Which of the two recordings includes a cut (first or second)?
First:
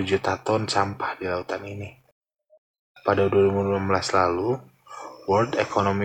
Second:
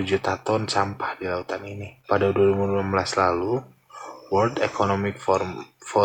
second